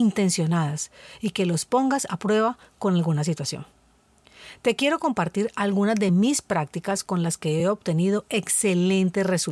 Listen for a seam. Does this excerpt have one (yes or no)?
no